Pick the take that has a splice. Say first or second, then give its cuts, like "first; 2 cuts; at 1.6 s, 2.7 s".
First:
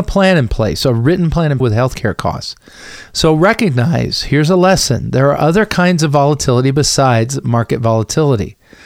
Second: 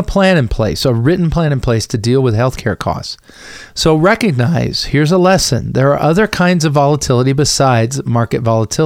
first; 1 cut; at 1.6 s